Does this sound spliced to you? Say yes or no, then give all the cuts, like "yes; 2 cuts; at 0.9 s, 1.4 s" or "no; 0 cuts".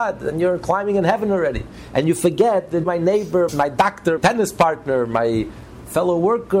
yes; 3 cuts; at 2.8 s, 3.5 s, 4.2 s